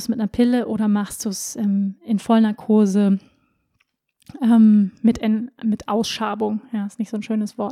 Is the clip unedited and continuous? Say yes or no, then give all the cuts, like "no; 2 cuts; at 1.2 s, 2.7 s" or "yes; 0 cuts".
yes; 0 cuts